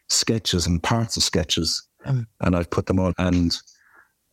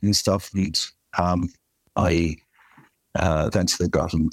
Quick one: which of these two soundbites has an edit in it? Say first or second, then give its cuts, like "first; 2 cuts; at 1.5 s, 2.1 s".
first; 1 cut; at 3.1 s